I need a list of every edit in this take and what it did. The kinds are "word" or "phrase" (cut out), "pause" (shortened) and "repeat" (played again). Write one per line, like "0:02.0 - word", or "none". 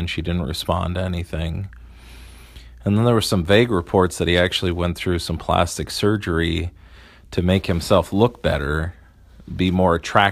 none